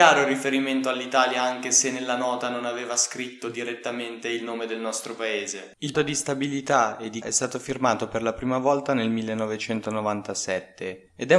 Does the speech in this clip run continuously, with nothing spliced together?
no; 2 cuts; at 5.9 s, 7.2 s

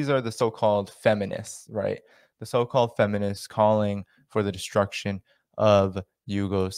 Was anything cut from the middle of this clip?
no; 0 cuts

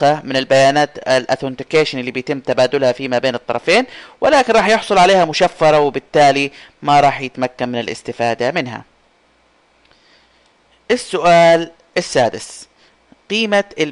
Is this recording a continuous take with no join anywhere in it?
yes; 0 cuts

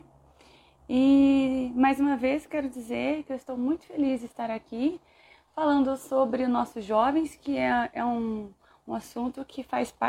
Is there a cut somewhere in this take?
no; 0 cuts

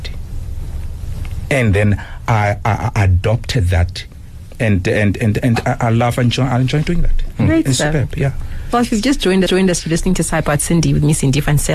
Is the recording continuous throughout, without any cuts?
no; 1 cut; at 9.5 s

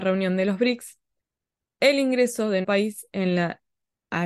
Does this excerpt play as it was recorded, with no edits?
no; 2 cuts; at 1.2 s, 2.6 s

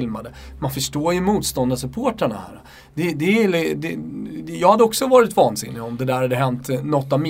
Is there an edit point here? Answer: no; 0 cuts

